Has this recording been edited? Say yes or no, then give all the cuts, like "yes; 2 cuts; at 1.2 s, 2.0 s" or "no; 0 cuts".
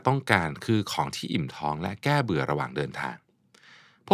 no; 0 cuts